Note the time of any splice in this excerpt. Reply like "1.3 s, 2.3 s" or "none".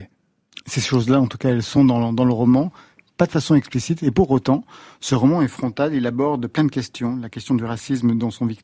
none